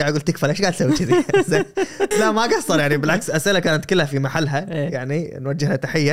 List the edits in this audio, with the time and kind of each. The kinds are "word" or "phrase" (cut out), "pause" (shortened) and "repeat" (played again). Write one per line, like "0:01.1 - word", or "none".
0:02.1 - word